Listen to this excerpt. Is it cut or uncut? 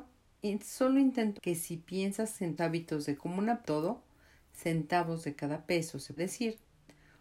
cut